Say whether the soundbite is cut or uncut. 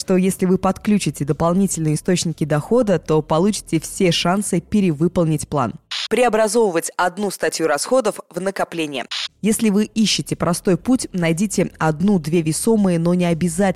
uncut